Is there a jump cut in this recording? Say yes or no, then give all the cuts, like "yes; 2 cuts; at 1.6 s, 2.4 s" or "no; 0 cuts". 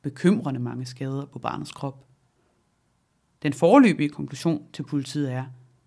no; 0 cuts